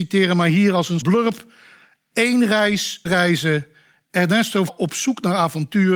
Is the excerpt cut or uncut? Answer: cut